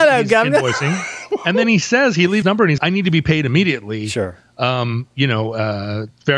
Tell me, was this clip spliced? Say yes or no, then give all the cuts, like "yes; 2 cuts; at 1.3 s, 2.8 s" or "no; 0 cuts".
yes; 2 cuts; at 2.4 s, 2.8 s